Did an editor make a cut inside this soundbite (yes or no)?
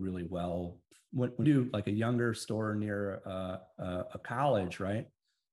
yes